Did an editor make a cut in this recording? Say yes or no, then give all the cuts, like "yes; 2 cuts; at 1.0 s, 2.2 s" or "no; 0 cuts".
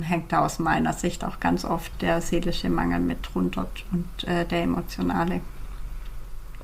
yes; 1 cut; at 1.9 s